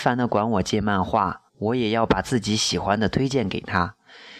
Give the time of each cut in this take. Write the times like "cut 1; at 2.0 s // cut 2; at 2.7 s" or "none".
cut 1; at 1.5 s